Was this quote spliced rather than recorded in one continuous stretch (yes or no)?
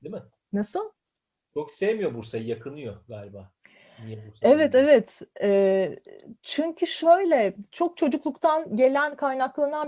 no